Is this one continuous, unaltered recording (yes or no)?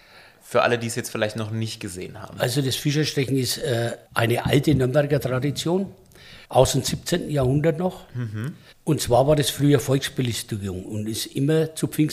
no